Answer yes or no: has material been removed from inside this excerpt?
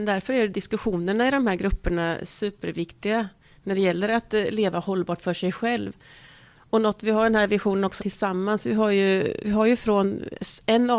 yes